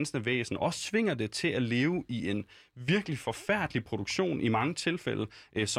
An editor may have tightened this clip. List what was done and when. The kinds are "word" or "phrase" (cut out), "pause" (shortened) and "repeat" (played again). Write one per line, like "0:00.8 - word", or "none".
none